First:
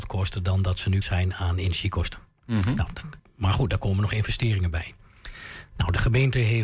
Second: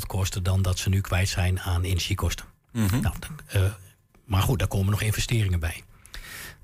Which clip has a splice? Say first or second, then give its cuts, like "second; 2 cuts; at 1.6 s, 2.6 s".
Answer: first; 2 cuts; at 1.0 s, 3.2 s